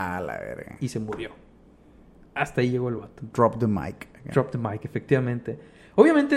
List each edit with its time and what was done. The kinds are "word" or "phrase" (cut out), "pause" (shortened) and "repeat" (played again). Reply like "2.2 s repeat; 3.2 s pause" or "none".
none